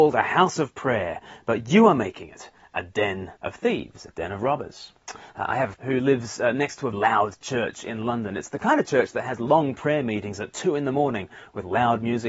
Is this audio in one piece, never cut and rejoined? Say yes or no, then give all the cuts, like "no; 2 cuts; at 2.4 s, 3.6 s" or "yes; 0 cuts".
no; 4 cuts; at 3.4 s, 5.0 s, 5.7 s, 6.9 s